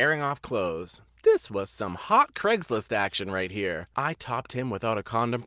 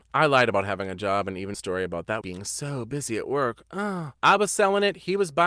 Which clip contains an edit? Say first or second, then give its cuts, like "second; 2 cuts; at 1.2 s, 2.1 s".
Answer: second; 2 cuts; at 1.5 s, 2.2 s